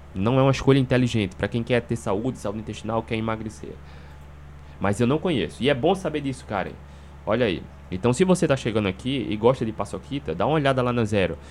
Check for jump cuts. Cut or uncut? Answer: uncut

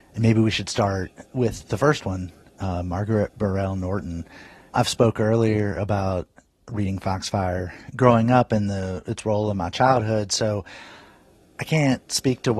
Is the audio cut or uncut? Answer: uncut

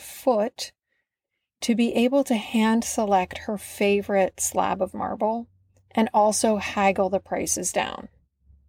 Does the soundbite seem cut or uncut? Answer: uncut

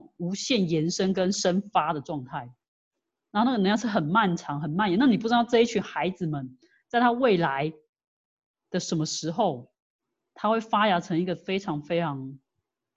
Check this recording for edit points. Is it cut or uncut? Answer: uncut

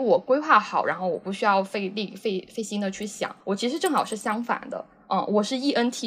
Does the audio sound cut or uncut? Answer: uncut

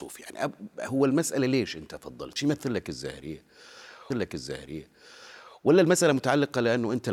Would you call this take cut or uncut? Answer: cut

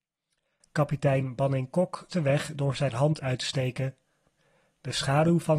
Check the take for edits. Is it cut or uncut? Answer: cut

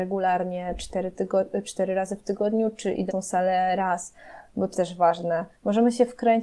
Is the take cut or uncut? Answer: cut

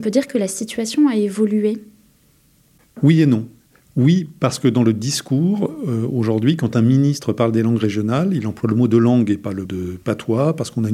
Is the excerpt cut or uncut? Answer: cut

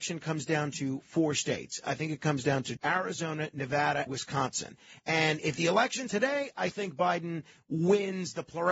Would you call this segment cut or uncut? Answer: cut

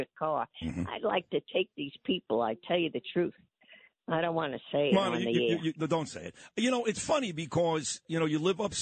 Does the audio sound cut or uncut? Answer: uncut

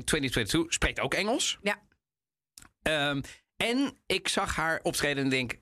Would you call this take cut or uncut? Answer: uncut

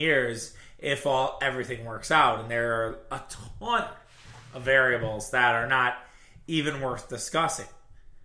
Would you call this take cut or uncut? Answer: uncut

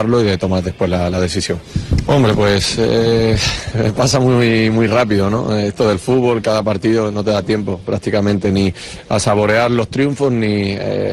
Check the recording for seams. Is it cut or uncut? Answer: uncut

